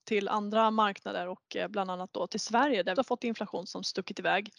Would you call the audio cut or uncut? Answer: cut